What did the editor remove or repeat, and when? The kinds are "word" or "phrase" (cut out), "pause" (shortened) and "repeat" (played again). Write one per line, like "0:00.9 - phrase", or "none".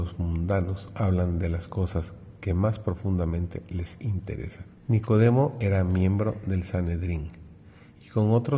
0:04.8 - pause